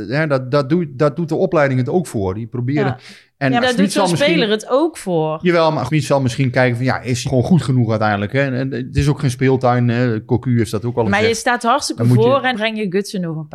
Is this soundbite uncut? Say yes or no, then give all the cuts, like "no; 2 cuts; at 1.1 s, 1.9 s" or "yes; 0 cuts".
no; 5 cuts; at 3.6 s, 5.9 s, 7.2 s, 11.0 s, 12.5 s